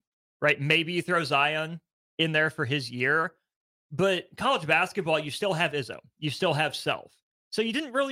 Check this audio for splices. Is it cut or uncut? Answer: uncut